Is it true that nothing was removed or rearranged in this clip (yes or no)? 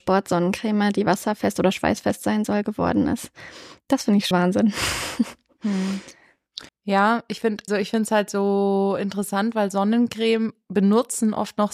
no